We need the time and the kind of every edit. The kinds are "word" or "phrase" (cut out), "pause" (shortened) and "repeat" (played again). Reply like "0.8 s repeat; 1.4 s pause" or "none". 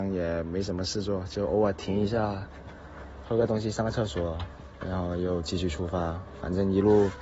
3.2 s phrase